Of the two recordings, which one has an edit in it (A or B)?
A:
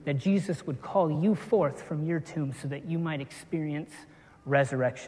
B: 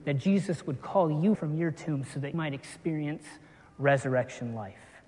B